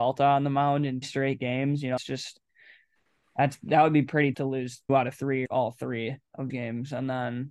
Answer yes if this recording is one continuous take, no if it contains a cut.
no